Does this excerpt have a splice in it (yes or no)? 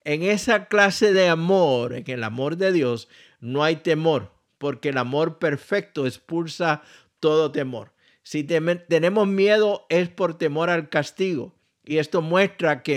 no